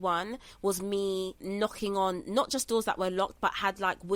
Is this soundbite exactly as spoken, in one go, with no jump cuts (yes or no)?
yes